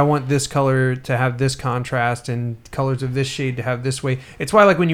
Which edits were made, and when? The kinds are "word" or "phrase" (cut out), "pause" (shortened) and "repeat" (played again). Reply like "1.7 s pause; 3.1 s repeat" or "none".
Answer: none